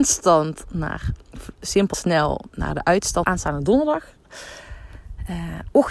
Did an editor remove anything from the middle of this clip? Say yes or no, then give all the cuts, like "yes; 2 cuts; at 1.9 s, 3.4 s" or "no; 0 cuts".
yes; 2 cuts; at 1.9 s, 3.2 s